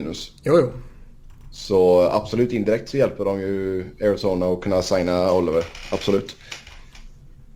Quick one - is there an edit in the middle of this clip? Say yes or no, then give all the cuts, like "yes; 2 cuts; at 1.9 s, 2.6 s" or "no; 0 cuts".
no; 0 cuts